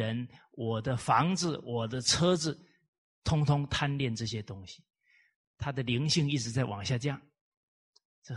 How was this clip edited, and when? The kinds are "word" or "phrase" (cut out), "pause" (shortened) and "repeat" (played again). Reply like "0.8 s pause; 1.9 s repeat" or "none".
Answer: none